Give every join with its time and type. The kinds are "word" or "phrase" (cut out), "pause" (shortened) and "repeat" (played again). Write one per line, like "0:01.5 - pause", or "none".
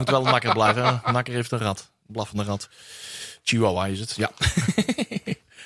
none